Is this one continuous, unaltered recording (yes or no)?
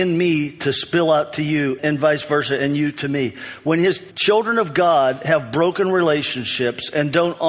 no